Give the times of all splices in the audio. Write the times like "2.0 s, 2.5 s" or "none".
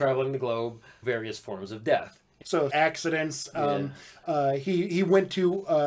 1.0 s, 2.7 s